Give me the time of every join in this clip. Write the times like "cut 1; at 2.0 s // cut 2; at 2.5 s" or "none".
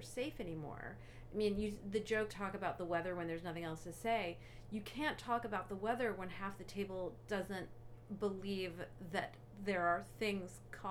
cut 1; at 2.3 s